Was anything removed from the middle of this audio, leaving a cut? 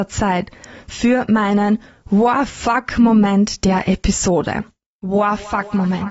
no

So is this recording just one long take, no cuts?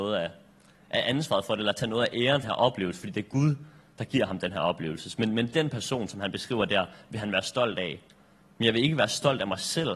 no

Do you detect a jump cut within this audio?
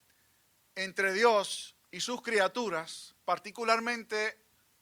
yes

